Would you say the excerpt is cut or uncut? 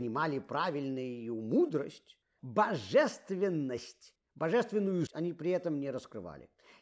cut